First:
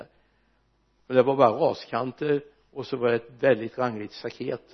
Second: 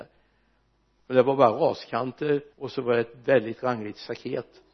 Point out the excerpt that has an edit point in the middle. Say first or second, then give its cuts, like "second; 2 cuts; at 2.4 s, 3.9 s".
second; 1 cut; at 2.5 s